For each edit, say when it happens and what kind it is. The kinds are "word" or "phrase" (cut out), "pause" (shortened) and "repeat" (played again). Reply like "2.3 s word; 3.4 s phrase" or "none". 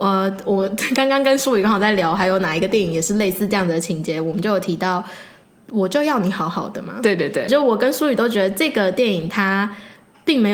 7.5 s word